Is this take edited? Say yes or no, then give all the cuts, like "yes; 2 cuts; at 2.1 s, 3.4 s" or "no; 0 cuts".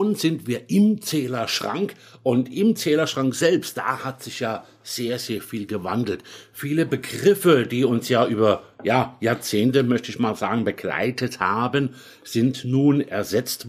no; 0 cuts